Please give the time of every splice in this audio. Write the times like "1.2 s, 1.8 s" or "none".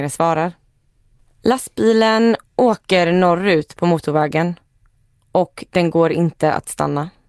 none

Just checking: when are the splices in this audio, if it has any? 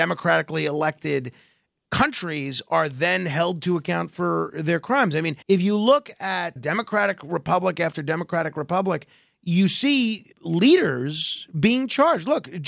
5.4 s, 6.6 s, 10.3 s

